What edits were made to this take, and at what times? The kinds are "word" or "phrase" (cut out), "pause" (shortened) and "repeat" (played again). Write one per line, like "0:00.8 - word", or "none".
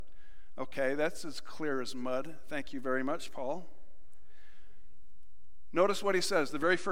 none